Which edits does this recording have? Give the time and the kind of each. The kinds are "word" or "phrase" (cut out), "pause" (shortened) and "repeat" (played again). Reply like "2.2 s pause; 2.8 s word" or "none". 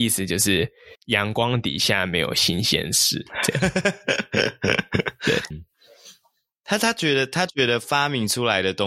0.9 s pause; 5.5 s word